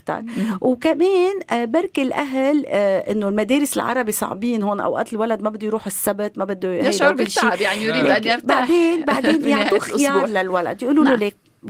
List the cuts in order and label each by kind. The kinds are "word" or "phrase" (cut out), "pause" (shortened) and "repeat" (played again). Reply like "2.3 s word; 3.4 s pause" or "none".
none